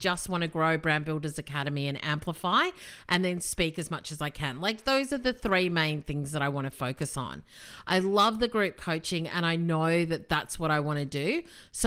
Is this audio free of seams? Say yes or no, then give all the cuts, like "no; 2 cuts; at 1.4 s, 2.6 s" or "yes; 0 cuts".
yes; 0 cuts